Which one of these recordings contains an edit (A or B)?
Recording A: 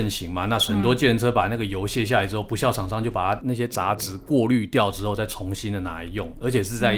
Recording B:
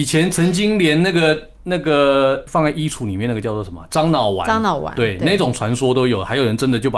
B